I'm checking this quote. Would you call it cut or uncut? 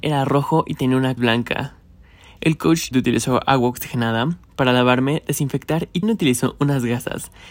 cut